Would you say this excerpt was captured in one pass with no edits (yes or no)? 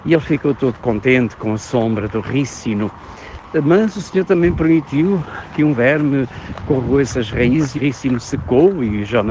no